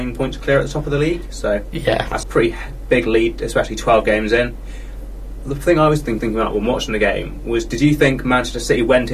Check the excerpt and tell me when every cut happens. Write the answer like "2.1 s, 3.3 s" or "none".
2.2 s, 6.2 s, 7.7 s